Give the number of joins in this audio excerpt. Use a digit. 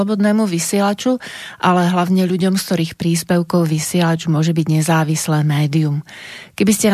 0